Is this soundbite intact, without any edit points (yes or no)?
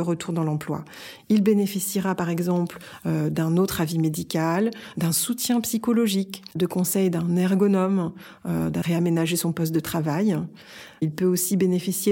no